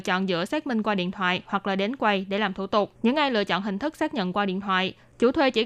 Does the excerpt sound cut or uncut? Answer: cut